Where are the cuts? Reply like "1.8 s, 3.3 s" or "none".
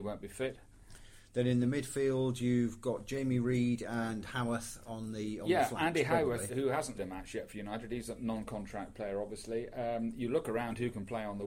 6.5 s, 7.0 s